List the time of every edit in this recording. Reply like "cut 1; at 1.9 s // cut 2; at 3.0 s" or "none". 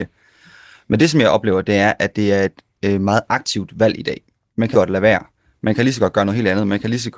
cut 1; at 4.7 s